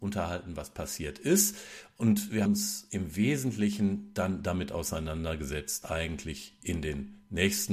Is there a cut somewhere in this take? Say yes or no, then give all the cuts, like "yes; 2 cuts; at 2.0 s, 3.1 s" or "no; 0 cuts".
yes; 2 cuts; at 2.5 s, 5.8 s